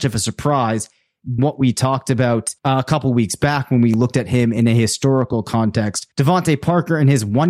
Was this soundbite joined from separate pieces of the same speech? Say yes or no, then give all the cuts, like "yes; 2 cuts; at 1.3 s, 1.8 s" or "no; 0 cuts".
yes; 3 cuts; at 1.4 s, 2.6 s, 6.1 s